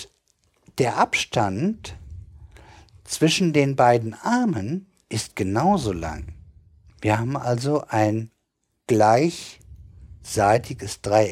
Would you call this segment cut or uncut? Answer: uncut